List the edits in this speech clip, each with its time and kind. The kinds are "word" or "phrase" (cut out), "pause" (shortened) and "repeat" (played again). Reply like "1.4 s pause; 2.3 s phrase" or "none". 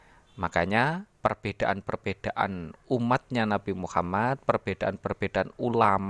1.1 s pause

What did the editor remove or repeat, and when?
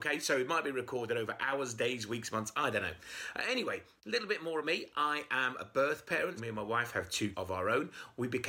4.6 s word; 6.4 s word; 7.3 s word

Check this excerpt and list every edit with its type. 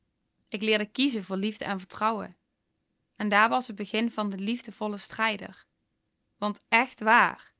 none

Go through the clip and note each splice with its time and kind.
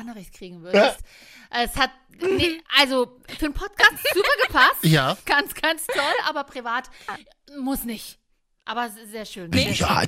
4.0 s word

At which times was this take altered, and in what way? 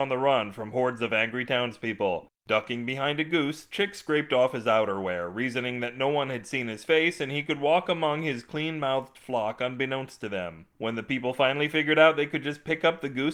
none

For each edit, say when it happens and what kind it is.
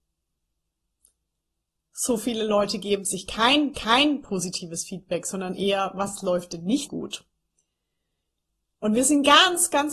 3.7 s repeat; 6.9 s word

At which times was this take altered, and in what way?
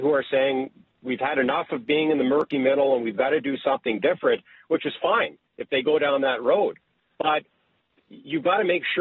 none

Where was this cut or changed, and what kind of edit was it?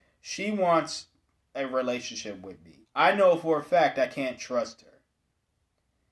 2.8 s pause

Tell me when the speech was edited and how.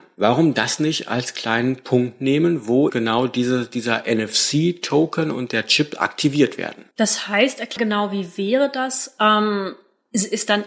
2.9 s word; 6.9 s pause; 7.8 s word

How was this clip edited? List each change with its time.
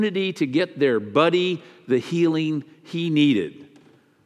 none

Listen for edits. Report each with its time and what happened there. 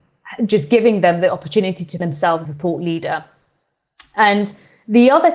2.0 s word; 2.4 s word

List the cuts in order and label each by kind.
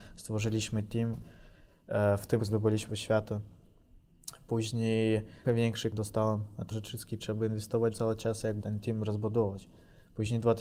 2.4 s word; 2.9 s word; 5.4 s word; 5.9 s word; 6.7 s word; 7.2 s word; 7.9 s word; 8.6 s word

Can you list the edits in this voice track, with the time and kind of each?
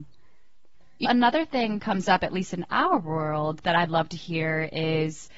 1.0 s word; 1.8 s word

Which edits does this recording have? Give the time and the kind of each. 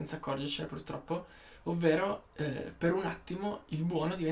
none

